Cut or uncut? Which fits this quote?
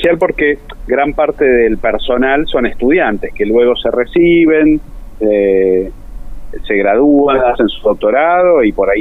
uncut